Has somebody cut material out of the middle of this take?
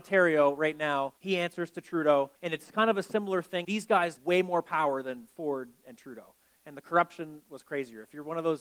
yes; 4 cuts; at 1.2 s, 2.4 s, 3.6 s, 4.2 s

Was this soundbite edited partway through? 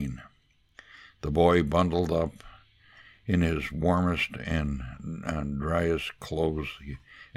no; 0 cuts

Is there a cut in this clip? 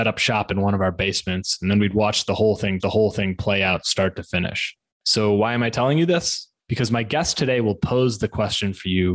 yes; 1 cut; at 2.8 s

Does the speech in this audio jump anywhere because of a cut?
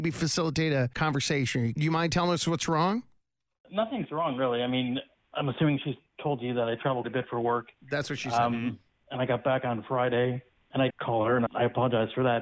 yes; 3 cuts; at 7.0 s, 10.9 s, 11.5 s

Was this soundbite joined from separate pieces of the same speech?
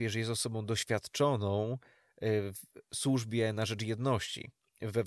no; 0 cuts

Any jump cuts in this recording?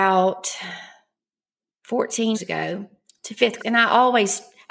yes; 2 cuts; at 2.3 s, 3.6 s

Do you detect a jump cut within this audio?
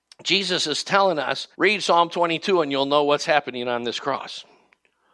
yes; 1 cut; at 1.5 s

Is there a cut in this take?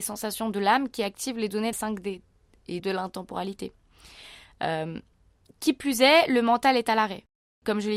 yes; 2 cuts; at 1.7 s, 2.8 s

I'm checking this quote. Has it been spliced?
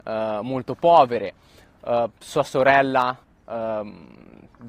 yes; 1 cut; at 3.2 s

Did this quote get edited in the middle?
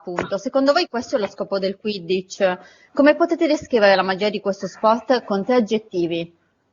no; 0 cuts

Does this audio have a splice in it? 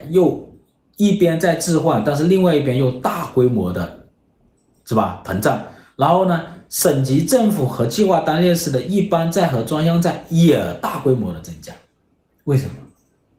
no; 0 cuts

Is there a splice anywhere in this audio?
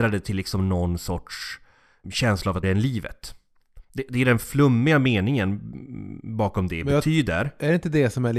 yes; 3 cuts; at 2.0 s, 2.6 s, 3.8 s

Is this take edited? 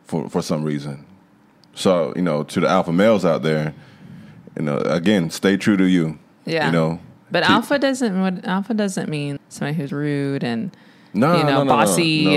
yes; 2 cuts; at 9.4 s, 9.9 s

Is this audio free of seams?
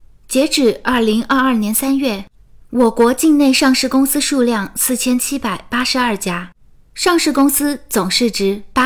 yes; 0 cuts

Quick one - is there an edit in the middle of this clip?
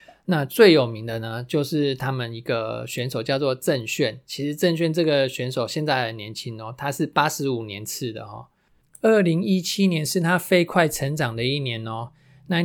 no; 0 cuts

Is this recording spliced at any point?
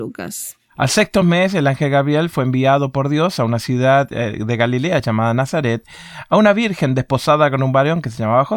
no; 0 cuts

